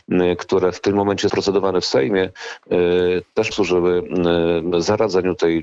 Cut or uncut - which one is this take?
cut